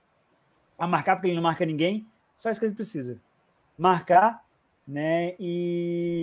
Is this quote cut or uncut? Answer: uncut